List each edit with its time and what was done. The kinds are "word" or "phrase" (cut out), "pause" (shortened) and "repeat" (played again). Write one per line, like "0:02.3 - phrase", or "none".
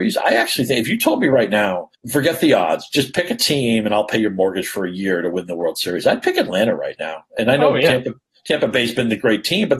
0:01.9 - pause